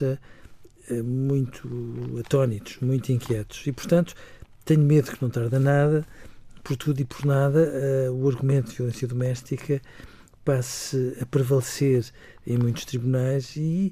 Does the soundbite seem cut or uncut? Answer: uncut